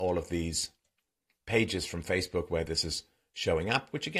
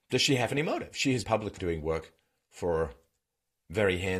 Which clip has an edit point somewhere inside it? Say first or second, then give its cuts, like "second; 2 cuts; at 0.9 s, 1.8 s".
second; 2 cuts; at 1.2 s, 1.6 s